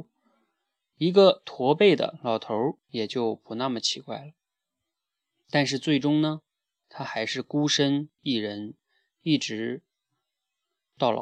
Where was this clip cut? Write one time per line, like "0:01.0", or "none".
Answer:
0:02.8